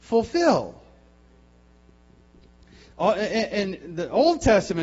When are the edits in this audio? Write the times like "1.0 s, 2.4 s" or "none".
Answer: none